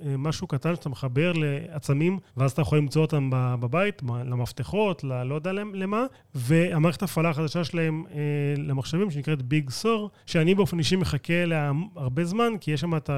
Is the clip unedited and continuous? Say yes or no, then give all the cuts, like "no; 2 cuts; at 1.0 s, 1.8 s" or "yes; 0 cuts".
no; 3 cuts; at 2.3 s, 6.1 s, 10.2 s